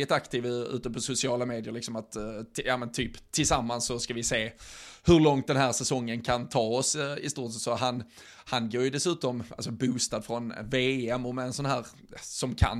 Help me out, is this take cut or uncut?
uncut